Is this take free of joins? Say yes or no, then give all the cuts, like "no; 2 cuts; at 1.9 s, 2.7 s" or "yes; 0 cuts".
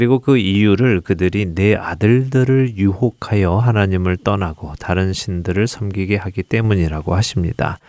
yes; 0 cuts